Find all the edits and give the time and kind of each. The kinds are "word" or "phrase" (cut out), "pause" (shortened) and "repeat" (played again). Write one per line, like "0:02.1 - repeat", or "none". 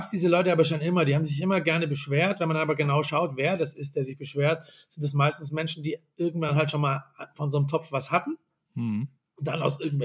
none